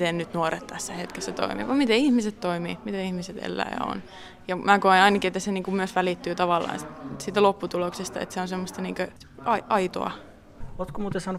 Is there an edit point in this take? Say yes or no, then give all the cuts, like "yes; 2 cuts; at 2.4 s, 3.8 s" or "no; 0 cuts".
no; 0 cuts